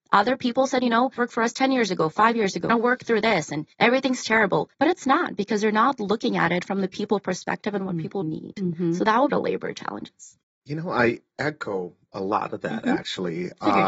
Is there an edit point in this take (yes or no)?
yes